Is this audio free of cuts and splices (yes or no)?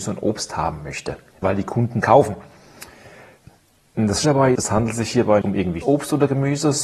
no